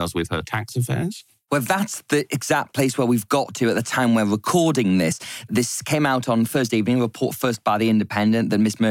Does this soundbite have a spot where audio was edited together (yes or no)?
no